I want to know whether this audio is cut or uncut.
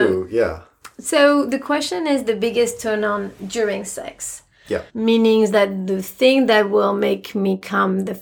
cut